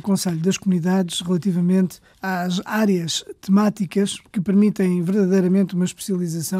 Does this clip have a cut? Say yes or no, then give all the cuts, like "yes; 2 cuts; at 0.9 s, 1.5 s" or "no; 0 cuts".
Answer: yes; 1 cut; at 2.1 s